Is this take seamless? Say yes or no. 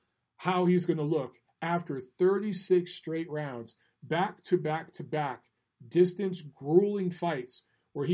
yes